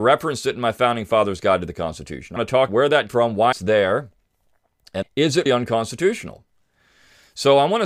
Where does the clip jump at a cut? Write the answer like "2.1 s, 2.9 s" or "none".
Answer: 2.4 s, 2.7 s, 3.1 s, 3.5 s, 5.0 s, 5.5 s